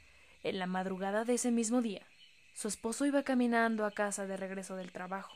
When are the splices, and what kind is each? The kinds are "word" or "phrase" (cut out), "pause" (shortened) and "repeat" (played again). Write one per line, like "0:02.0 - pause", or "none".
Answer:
0:02.4 - pause